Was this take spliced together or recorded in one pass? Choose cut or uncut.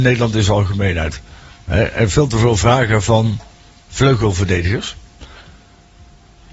uncut